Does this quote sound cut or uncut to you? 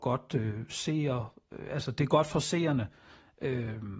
uncut